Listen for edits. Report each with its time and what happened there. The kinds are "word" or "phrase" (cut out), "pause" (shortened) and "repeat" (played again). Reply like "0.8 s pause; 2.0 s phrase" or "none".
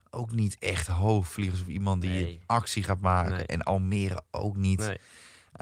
none